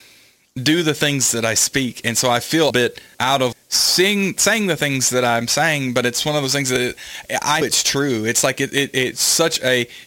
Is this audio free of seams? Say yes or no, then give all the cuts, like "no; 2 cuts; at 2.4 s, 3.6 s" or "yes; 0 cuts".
no; 4 cuts; at 2.7 s, 3.1 s, 3.5 s, 7.6 s